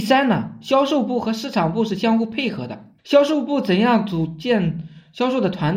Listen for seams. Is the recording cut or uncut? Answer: cut